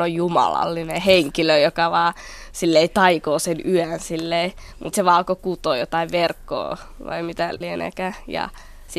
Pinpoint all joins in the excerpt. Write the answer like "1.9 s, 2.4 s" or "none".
4.9 s, 7.6 s